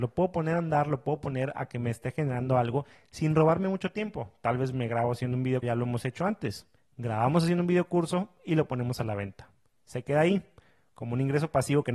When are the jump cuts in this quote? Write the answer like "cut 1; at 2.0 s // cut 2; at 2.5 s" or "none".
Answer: cut 1; at 5.6 s